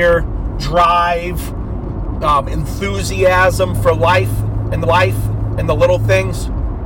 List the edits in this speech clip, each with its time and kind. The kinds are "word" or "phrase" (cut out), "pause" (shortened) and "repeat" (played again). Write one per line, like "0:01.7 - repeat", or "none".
0:04.8 - repeat